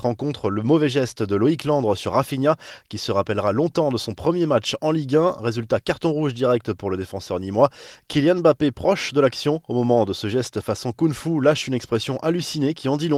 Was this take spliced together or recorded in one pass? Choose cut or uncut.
uncut